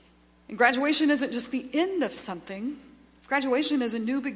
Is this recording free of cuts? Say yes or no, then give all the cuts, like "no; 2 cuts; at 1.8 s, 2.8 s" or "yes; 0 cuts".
yes; 0 cuts